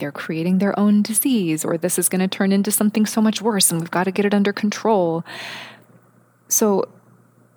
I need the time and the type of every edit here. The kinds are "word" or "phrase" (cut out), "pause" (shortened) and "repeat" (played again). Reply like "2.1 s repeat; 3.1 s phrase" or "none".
none